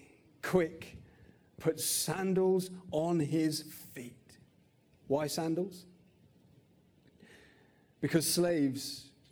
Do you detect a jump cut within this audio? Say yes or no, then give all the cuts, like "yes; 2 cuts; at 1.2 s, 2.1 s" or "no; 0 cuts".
no; 0 cuts